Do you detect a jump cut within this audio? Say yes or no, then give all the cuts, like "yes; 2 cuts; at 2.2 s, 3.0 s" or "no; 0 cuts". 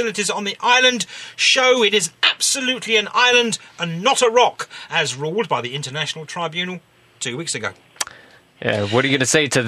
no; 0 cuts